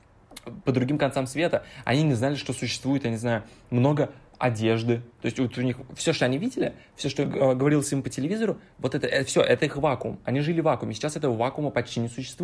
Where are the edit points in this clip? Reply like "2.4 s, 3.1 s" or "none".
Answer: none